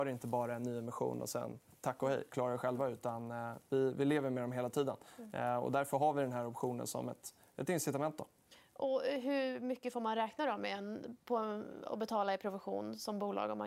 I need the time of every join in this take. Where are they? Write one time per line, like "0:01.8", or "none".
none